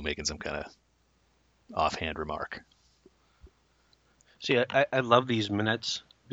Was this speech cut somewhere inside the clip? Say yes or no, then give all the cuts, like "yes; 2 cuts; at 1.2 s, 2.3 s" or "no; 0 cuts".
no; 0 cuts